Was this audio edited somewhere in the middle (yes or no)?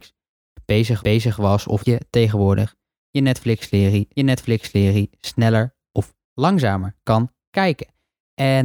yes